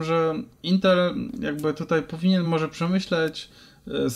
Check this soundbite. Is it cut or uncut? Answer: uncut